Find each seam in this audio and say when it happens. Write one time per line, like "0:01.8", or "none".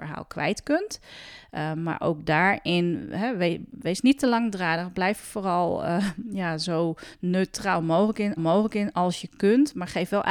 0:08.4